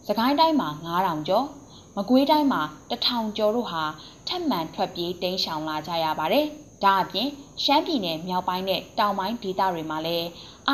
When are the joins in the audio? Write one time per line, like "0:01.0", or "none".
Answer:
0:06.7

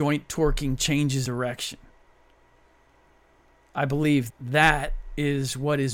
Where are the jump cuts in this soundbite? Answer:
0:01.2
0:04.3

